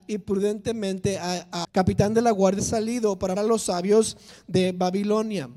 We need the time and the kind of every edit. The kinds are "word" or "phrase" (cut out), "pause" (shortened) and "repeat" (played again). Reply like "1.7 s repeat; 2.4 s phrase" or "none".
1.6 s word; 2.6 s phrase; 3.4 s word